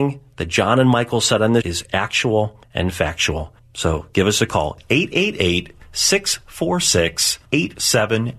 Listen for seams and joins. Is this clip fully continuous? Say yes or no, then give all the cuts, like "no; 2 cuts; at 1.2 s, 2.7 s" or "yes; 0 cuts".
no; 3 cuts; at 1.6 s, 2.6 s, 3.6 s